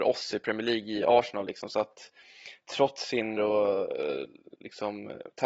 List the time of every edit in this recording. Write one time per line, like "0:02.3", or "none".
0:03.4